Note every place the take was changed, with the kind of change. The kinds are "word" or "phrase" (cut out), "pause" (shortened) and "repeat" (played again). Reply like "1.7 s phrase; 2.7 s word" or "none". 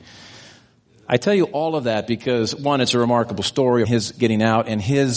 3.8 s phrase